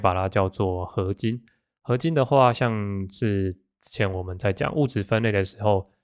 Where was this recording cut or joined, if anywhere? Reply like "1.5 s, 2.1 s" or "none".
none